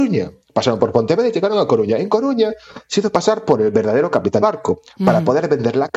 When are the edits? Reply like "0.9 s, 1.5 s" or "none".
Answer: 4.4 s